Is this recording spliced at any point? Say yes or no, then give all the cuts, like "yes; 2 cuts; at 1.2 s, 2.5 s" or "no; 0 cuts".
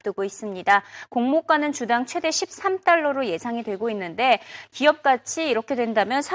no; 0 cuts